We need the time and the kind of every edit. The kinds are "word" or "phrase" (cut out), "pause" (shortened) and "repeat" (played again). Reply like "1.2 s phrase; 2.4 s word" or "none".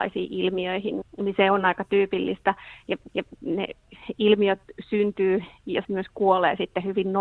1.0 s word; 3.1 s repeat; 5.8 s word